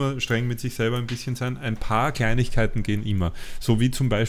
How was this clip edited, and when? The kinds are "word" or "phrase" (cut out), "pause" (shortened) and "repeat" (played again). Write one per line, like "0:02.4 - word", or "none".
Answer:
none